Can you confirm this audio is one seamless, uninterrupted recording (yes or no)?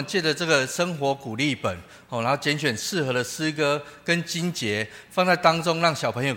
yes